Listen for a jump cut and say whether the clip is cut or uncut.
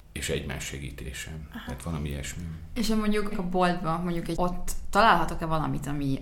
cut